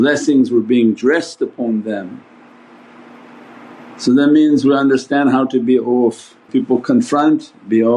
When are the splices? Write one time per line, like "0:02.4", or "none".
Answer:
0:06.5